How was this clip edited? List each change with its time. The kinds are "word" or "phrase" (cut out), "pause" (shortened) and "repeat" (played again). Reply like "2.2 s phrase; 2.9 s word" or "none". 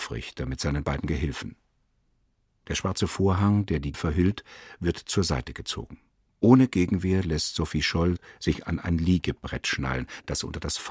3.9 s word; 6.3 s pause